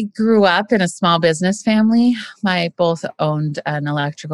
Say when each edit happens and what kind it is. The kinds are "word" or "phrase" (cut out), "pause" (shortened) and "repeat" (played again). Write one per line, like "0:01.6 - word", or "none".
0:02.7 - word